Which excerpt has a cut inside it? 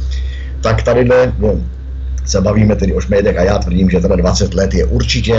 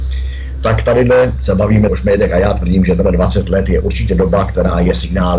second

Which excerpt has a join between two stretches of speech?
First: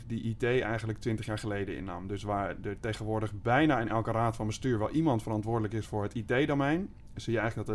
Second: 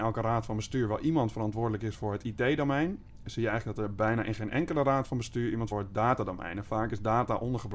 second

